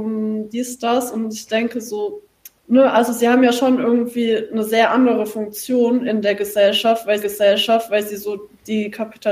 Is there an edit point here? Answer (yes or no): yes